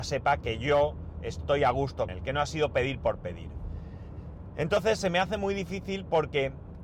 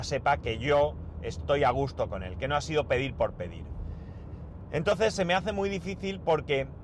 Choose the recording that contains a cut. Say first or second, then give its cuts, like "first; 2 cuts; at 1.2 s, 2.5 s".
first; 1 cut; at 2.1 s